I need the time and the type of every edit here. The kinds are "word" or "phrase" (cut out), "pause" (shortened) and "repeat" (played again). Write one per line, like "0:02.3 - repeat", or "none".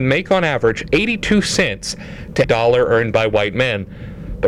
0:02.4 - word

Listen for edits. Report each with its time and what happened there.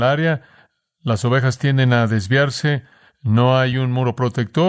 none

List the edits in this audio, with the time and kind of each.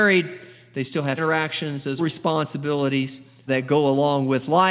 0:01.2 - word
0:02.0 - phrase
0:03.5 - word

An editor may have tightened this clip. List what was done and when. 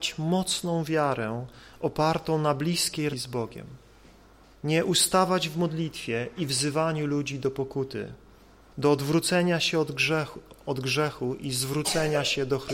0:03.1 - word

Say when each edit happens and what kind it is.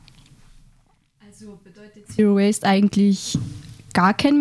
none

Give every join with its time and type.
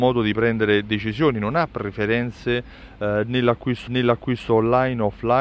0:03.9 - repeat

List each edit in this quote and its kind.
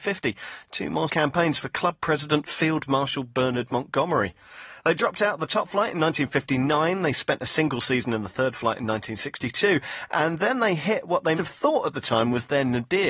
0:01.1 - word
0:11.4 - word

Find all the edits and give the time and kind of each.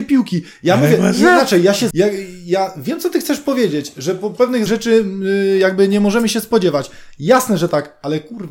0:01.9 - phrase
0:04.7 - phrase

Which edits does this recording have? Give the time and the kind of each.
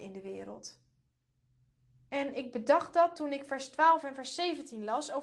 none

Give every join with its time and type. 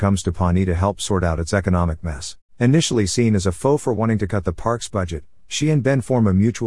0:02.5 - pause

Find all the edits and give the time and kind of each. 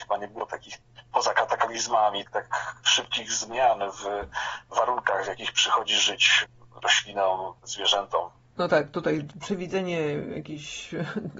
0:07.6 - pause

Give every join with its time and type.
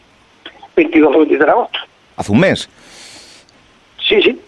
0:01.1 - word

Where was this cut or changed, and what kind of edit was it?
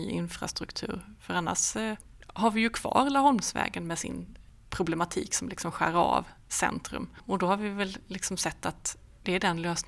none

